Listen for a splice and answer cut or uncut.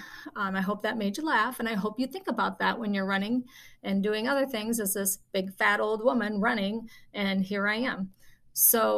uncut